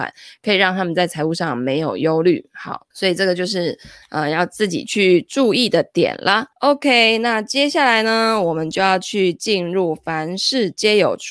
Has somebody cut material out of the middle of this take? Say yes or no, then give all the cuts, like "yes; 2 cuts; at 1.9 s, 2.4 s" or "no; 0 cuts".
yes; 2 cuts; at 2.9 s, 6.5 s